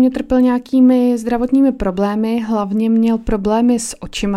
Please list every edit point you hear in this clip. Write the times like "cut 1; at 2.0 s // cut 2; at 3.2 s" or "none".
none